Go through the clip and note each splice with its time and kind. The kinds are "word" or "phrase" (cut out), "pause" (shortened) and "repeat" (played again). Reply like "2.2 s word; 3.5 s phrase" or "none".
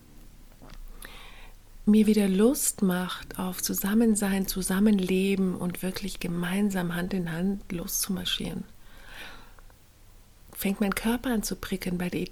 none